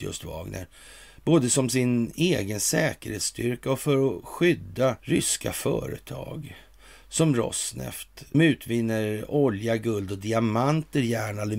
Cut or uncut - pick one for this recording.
cut